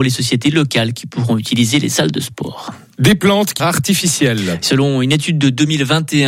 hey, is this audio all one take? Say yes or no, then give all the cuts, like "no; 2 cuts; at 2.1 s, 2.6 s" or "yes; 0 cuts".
no; 1 cut; at 3.6 s